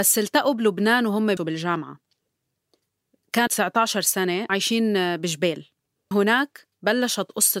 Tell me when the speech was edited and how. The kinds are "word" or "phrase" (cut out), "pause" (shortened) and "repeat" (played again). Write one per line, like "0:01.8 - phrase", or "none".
0:01.4 - word
0:03.5 - word
0:04.5 - word
0:06.1 - word